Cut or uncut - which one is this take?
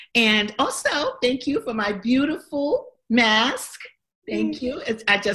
uncut